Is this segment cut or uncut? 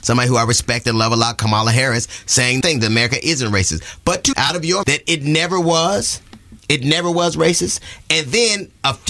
cut